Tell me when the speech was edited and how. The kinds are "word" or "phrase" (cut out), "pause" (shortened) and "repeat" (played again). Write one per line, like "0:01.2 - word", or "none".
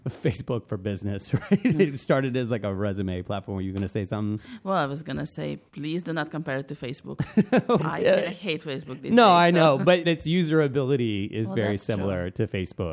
0:05.7 - pause
0:07.8 - word
0:10.0 - word